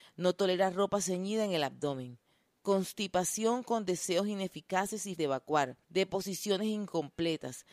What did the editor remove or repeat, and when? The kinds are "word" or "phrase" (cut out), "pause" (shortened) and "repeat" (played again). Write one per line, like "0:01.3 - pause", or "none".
0:05.2 - word
0:05.8 - pause